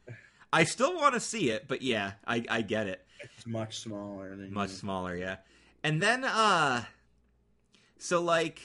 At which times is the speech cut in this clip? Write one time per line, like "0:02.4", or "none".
none